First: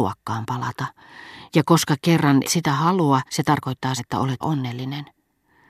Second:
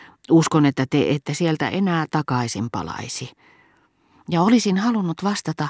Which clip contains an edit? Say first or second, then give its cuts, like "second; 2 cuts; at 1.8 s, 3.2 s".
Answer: first; 4 cuts; at 2.4 s, 3.3 s, 4.0 s, 4.4 s